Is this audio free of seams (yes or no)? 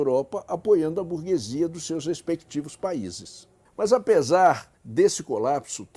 no